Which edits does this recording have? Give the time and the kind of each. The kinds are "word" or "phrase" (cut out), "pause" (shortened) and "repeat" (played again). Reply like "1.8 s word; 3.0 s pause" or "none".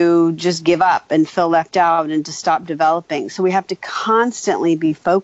none